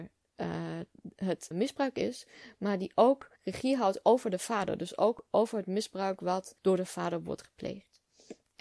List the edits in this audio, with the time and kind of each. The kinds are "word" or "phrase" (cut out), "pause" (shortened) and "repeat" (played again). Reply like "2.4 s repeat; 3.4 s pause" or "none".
1.5 s word; 3.4 s pause; 6.6 s pause